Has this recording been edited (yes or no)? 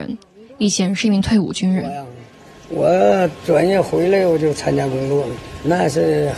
no